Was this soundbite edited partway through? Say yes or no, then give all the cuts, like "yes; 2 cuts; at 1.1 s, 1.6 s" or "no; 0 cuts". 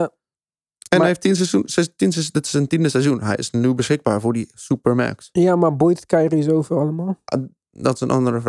no; 0 cuts